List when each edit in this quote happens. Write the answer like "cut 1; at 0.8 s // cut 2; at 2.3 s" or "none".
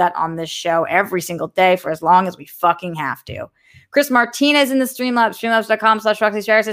none